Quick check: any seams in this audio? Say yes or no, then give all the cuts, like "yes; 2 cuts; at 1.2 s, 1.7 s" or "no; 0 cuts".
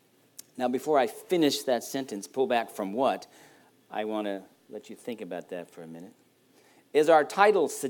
no; 0 cuts